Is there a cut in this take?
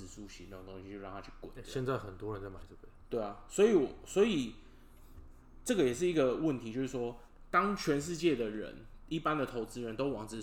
no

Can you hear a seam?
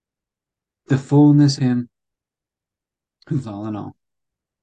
yes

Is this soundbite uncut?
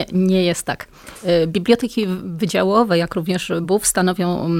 yes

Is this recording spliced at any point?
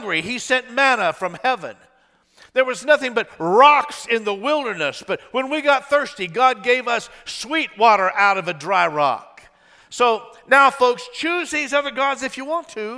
no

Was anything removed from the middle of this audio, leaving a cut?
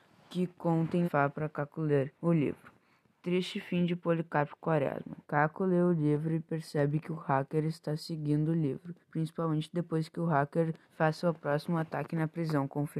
yes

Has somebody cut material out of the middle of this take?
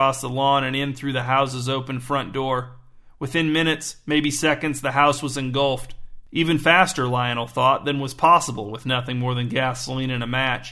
no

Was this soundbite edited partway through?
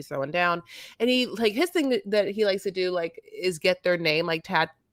no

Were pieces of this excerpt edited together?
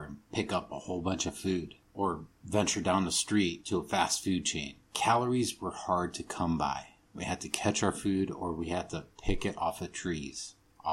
yes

